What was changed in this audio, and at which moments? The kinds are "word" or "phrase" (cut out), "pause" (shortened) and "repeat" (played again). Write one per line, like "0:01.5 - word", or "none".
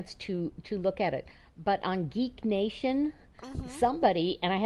none